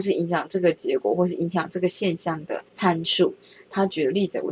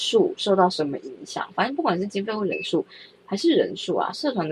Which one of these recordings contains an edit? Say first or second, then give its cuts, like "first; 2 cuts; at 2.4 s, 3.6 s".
first; 1 cut; at 2.7 s